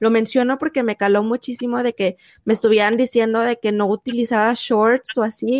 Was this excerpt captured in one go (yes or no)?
yes